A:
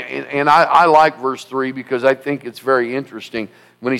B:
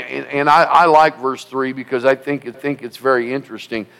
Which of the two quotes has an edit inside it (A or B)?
B